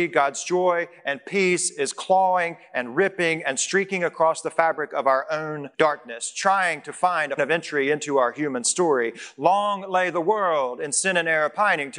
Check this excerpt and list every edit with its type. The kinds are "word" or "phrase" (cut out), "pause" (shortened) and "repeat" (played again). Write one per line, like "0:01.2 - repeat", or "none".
0:05.7 - pause
0:07.4 - word